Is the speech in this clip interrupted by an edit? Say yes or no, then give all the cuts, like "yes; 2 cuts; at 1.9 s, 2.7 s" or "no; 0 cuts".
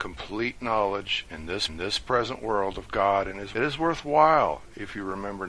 yes; 2 cuts; at 1.7 s, 3.5 s